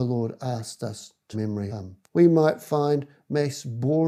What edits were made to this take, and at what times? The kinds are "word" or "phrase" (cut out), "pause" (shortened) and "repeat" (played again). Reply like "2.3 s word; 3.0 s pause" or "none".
1.3 s phrase; 1.7 s word; 2.1 s pause